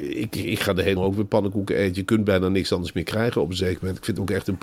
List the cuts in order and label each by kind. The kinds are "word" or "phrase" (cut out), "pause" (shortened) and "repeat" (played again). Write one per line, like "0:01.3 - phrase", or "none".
0:01.0 - word

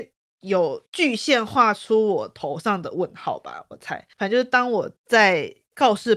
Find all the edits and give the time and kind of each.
0:04.1 - pause
0:05.0 - pause

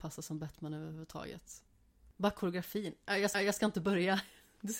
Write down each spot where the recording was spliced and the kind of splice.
0:03.3 - repeat

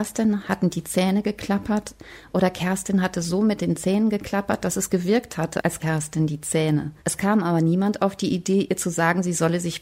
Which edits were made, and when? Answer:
0:05.8 - word
0:07.0 - pause

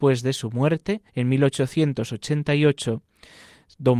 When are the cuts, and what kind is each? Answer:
0:01.1 - pause

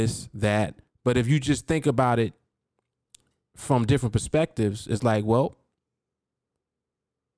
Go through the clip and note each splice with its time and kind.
none

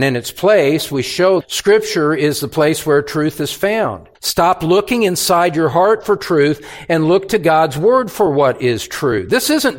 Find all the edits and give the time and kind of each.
0:01.4 - phrase
0:04.1 - pause

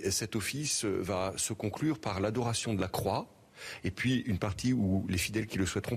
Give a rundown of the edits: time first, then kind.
none

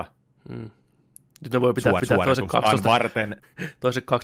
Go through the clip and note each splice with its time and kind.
0:02.0 - repeat

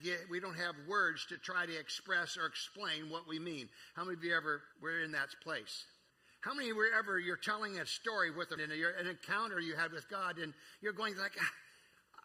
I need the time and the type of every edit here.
0:04.7 - pause
0:06.1 - pause
0:08.6 - word

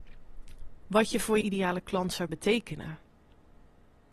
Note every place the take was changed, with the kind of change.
0:01.4 - word
0:02.3 - word

